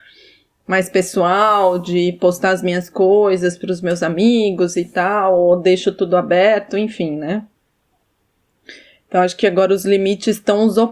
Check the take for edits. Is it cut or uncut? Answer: uncut